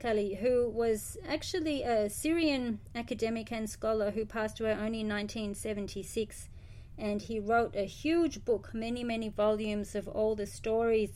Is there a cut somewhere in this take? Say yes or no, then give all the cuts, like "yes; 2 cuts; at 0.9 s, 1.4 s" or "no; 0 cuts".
no; 0 cuts